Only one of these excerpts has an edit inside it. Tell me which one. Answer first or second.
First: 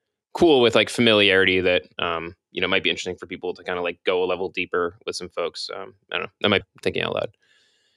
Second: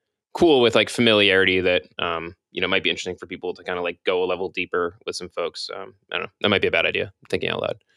first